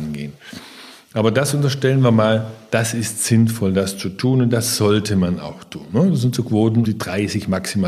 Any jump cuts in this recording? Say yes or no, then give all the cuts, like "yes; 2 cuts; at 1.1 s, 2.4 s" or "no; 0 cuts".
yes; 1 cut; at 6.8 s